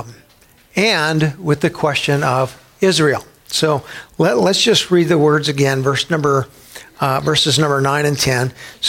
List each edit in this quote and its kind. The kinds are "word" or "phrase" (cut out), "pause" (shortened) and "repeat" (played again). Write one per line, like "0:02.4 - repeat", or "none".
none